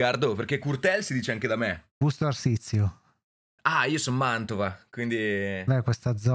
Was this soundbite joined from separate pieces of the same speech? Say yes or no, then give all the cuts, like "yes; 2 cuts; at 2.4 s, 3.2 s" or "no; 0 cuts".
no; 0 cuts